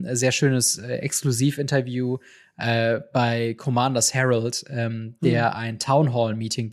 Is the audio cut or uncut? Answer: uncut